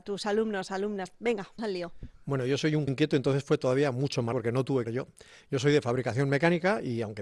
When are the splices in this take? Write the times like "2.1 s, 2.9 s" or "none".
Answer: 1.6 s, 2.9 s, 4.3 s, 4.8 s